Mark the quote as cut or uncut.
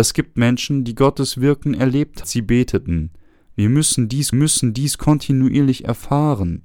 cut